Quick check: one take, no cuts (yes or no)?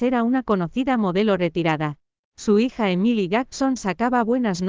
yes